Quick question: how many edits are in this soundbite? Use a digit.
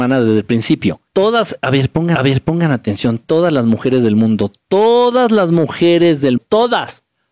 3